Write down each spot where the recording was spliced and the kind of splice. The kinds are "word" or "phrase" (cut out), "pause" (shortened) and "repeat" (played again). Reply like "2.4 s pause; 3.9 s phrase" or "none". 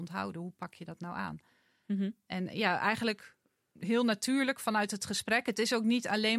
none